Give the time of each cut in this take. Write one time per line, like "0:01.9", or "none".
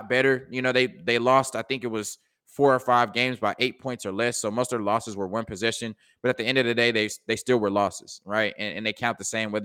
none